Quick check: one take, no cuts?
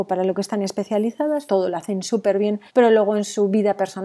no; 2 cuts; at 1.5 s, 2.7 s

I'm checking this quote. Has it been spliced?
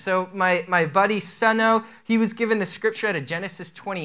no; 0 cuts

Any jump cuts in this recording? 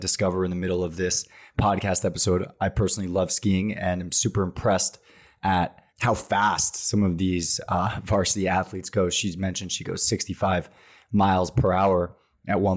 yes; 1 cut; at 5.9 s

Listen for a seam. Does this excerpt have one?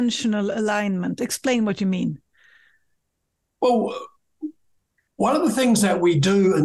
no; 0 cuts

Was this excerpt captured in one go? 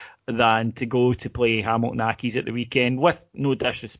yes; 0 cuts

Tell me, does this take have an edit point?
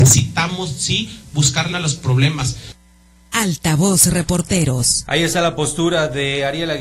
yes; 1 cut; at 1.7 s

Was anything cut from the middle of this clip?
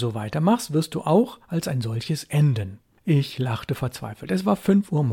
no; 0 cuts

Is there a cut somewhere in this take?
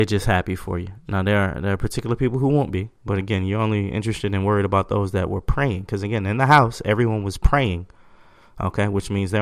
no; 0 cuts

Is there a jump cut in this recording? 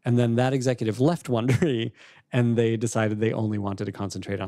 no; 0 cuts

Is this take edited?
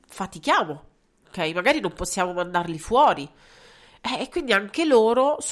no; 0 cuts

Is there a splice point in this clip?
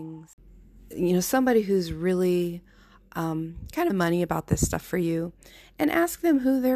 yes; 1 cut; at 3.9 s

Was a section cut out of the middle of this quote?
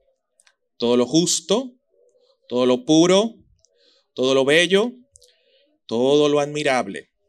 no; 0 cuts

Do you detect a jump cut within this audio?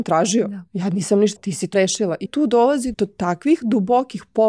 yes; 4 cuts; at 1.4 s, 1.7 s, 2.3 s, 2.9 s

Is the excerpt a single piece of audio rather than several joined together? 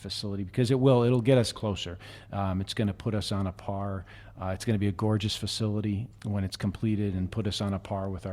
no; 1 cut; at 6.1 s

